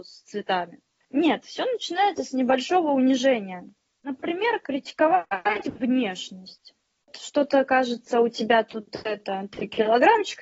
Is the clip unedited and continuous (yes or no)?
yes